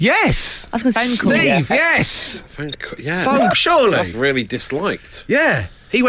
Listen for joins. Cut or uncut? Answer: cut